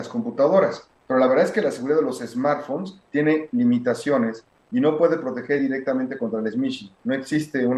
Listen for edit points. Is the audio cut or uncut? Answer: uncut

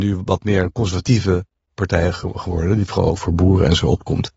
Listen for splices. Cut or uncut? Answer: uncut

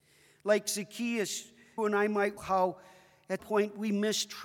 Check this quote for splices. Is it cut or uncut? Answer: cut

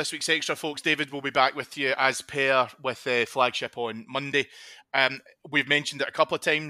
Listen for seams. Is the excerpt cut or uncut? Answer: uncut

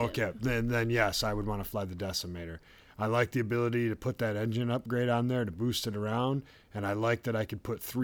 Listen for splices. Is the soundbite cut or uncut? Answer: uncut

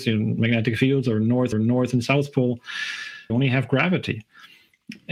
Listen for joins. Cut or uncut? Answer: cut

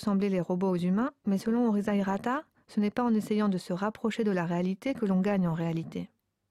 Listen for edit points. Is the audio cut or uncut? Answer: uncut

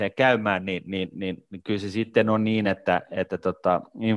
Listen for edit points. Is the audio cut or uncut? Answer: uncut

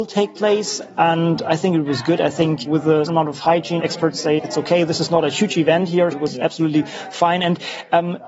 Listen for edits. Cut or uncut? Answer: cut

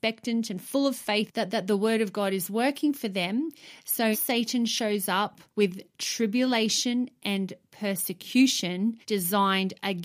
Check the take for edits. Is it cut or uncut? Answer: cut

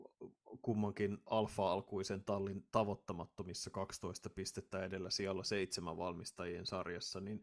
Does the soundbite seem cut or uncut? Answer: uncut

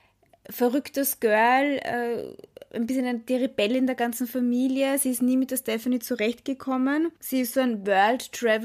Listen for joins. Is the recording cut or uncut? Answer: cut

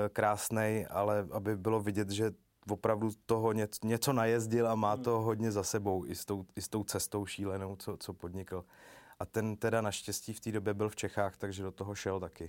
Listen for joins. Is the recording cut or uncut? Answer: uncut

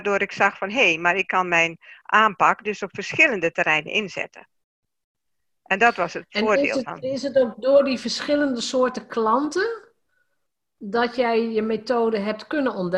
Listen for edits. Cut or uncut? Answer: uncut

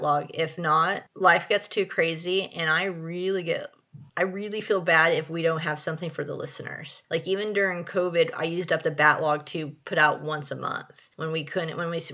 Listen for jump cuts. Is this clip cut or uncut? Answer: cut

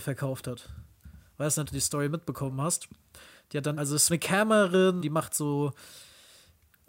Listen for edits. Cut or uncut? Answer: cut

